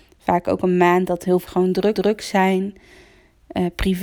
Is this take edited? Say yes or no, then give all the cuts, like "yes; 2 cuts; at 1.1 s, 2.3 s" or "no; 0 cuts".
yes; 2 cuts; at 1.5 s, 2.0 s